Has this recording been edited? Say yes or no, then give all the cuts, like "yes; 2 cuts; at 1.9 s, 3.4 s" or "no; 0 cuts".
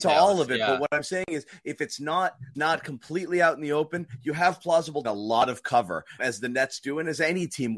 yes; 3 cuts; at 2.5 s, 5.0 s, 6.2 s